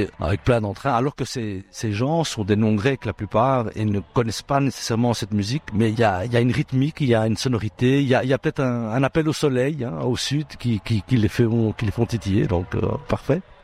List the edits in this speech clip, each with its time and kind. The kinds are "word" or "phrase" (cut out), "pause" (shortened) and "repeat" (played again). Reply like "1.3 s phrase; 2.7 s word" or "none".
none